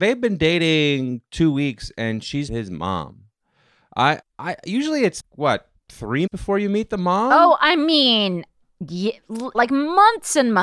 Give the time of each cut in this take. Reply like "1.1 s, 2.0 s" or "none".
2.5 s, 4.2 s, 5.2 s, 6.3 s, 9.5 s